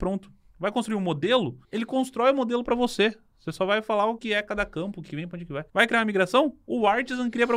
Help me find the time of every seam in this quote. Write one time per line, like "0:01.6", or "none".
0:01.6
0:04.2
0:05.1
0:05.7